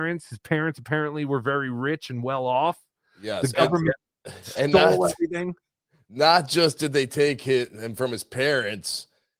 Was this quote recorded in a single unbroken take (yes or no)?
yes